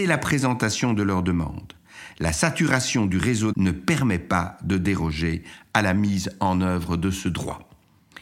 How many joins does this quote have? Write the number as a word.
one